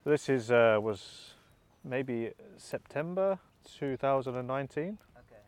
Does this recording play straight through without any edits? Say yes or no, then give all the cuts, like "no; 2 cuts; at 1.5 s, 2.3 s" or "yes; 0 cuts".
yes; 0 cuts